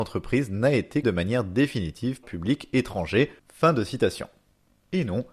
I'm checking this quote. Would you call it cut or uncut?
cut